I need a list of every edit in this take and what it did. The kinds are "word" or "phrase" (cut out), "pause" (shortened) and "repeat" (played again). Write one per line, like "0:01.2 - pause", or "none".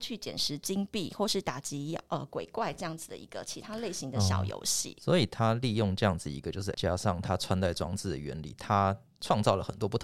0:06.7 - word